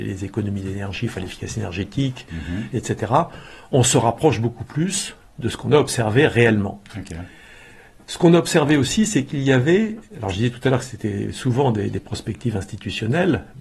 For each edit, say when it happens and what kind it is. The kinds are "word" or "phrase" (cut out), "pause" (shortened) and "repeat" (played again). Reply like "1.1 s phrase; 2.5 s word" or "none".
none